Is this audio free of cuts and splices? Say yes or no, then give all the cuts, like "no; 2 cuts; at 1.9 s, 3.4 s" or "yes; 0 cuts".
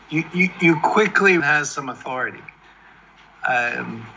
no; 1 cut; at 1.4 s